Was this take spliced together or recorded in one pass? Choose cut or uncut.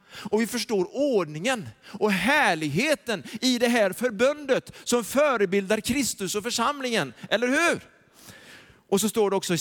uncut